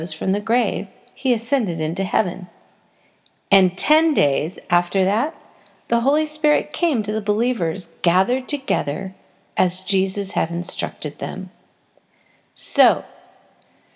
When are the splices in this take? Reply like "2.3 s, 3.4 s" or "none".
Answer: none